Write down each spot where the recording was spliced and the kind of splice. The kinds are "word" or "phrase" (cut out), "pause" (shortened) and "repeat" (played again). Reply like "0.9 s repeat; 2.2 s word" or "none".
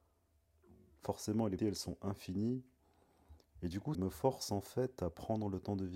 1.6 s word; 3.9 s word

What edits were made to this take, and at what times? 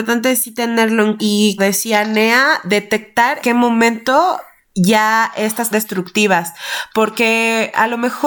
1.2 s word; 1.6 s word; 3.4 s word; 4.6 s pause; 5.7 s phrase

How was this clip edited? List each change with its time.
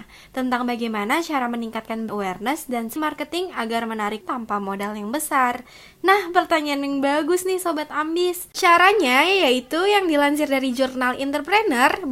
2.1 s word; 3.0 s word; 4.2 s word

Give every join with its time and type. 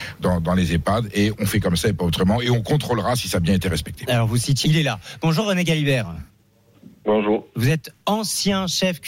4.6 s phrase

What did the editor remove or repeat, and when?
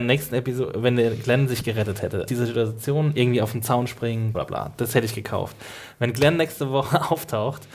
2.3 s word; 4.3 s word

